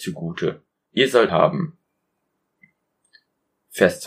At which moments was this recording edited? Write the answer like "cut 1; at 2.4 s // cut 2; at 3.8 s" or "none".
cut 1; at 1.3 s